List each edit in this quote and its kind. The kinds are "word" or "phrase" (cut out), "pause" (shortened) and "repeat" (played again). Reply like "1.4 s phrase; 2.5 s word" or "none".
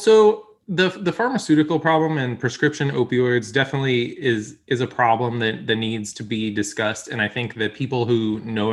none